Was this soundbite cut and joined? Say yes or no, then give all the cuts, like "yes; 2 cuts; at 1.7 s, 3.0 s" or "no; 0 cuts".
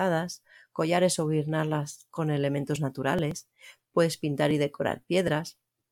no; 0 cuts